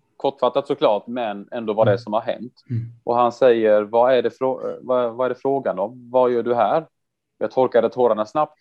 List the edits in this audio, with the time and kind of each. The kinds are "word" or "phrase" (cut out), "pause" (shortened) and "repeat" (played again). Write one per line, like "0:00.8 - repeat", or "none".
0:02.6 - pause